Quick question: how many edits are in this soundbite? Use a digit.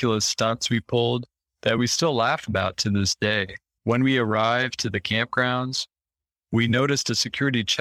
0